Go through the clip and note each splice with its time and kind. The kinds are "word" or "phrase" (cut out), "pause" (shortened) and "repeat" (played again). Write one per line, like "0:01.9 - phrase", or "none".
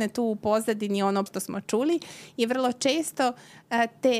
0:01.3 - word